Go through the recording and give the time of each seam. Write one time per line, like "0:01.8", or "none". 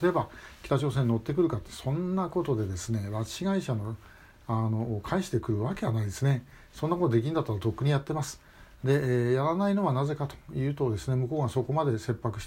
none